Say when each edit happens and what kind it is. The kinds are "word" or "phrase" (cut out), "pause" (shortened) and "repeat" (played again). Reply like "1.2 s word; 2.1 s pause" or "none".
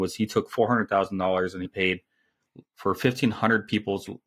1.7 s word; 2.6 s word